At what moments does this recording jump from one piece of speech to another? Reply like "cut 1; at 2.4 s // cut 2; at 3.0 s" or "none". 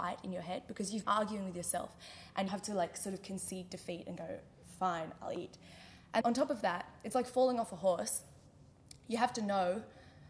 cut 1; at 1.0 s // cut 2; at 2.5 s // cut 3; at 6.2 s